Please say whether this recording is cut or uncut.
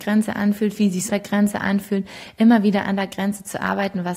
cut